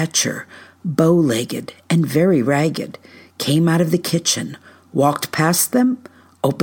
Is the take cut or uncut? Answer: uncut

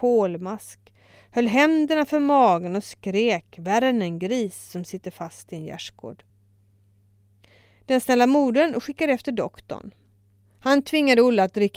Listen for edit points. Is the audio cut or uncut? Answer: uncut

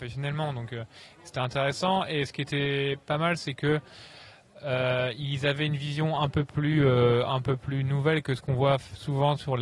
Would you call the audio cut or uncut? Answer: uncut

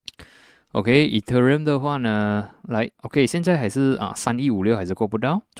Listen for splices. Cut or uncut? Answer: cut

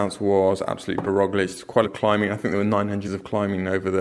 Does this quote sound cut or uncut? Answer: cut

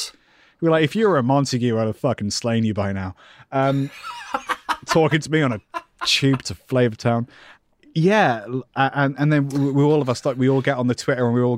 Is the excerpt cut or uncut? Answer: uncut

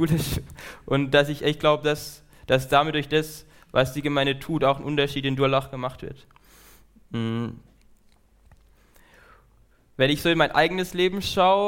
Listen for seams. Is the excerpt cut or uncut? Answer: uncut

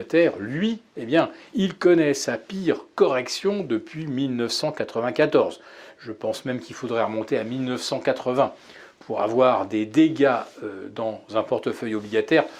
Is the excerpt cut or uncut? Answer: uncut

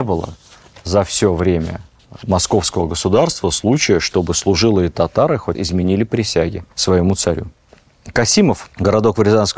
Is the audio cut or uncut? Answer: cut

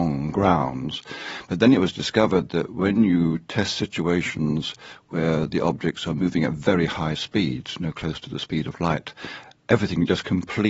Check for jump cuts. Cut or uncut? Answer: uncut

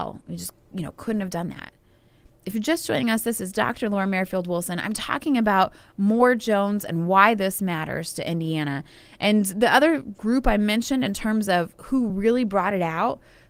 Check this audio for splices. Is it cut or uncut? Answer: uncut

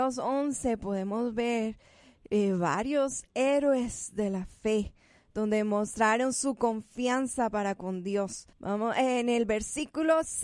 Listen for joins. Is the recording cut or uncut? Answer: cut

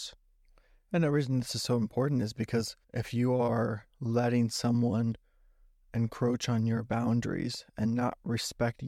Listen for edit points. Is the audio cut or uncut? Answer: cut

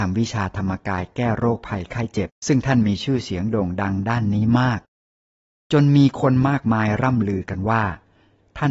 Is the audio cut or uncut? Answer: cut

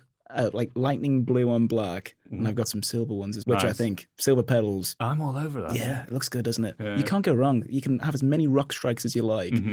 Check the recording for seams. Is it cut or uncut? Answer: cut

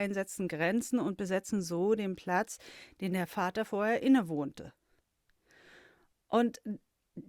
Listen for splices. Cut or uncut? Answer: uncut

